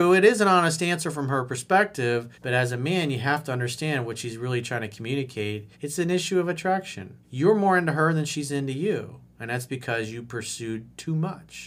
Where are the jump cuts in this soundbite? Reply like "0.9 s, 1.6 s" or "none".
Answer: 2.3 s, 5.7 s, 7.2 s